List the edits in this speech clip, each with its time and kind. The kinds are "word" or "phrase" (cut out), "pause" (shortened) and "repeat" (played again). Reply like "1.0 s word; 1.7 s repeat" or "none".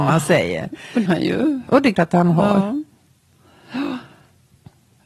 1.1 s word; 1.9 s word

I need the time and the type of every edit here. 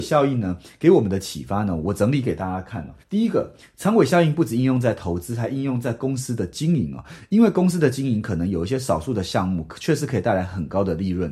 3.0 s pause

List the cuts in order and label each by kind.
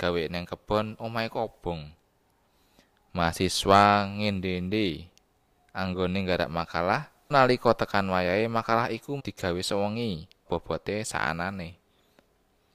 7.3 s word; 9.2 s word; 10.5 s word

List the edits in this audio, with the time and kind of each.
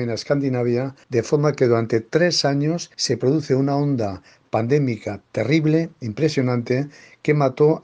1.0 s pause; 2.9 s pause

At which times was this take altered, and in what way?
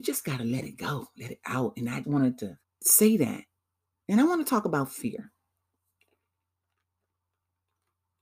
2.0 s word; 2.6 s pause; 3.6 s pause

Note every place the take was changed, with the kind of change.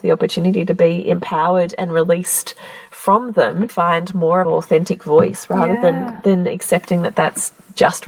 3.7 s word; 4.4 s word

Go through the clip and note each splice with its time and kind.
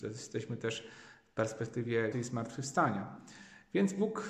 2.1 s word

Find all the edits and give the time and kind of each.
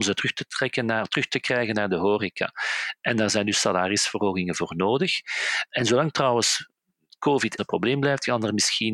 7.6 s word

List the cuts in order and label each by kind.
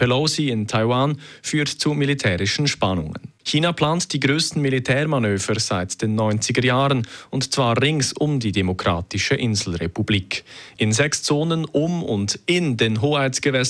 none

